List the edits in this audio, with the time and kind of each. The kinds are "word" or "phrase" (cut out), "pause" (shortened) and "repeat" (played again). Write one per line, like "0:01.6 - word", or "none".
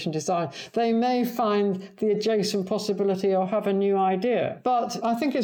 none